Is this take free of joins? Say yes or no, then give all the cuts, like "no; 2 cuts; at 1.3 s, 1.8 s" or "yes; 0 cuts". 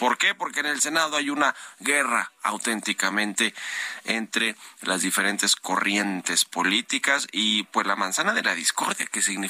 yes; 0 cuts